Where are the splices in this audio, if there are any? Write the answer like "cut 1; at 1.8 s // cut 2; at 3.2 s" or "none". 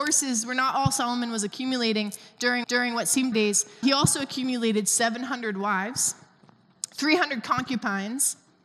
cut 1; at 2.6 s // cut 2; at 3.3 s // cut 3; at 3.8 s